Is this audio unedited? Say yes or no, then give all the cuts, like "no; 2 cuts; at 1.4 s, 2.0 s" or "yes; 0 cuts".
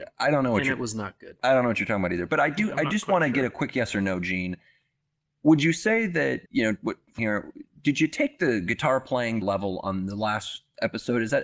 no; 3 cuts; at 6.5 s, 7.2 s, 9.4 s